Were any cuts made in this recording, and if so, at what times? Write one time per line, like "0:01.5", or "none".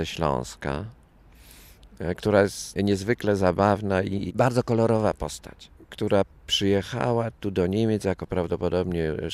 0:06.3